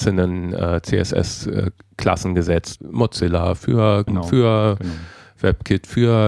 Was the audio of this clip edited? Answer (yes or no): yes